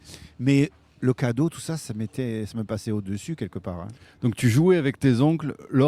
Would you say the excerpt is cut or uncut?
uncut